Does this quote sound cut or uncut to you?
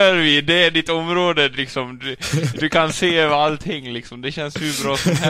uncut